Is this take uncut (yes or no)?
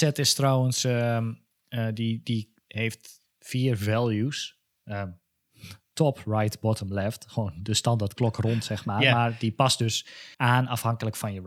no